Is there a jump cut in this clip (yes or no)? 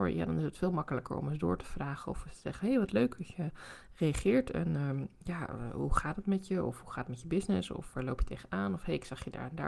no